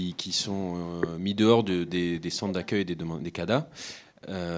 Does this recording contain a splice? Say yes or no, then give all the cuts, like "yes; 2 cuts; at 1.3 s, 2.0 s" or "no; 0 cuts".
no; 0 cuts